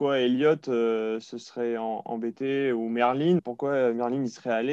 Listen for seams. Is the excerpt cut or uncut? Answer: cut